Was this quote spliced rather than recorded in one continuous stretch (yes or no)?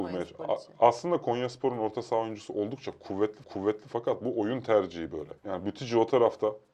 yes